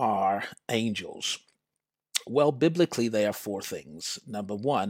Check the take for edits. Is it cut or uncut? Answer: uncut